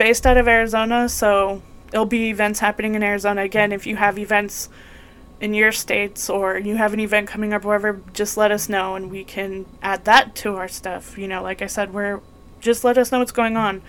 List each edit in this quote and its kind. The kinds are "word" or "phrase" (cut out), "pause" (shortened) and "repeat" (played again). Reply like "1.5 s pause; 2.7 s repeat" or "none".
none